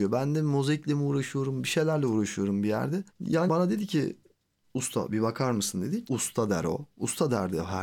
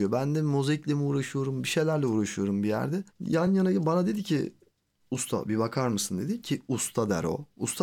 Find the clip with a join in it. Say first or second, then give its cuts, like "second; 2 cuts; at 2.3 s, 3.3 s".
first; 2 cuts; at 3.5 s, 6.1 s